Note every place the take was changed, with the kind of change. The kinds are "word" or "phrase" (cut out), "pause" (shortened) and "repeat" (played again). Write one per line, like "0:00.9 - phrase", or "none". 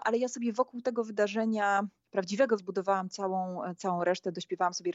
0:02.6 - word